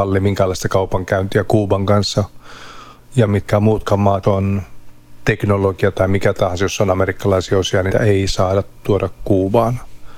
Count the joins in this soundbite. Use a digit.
3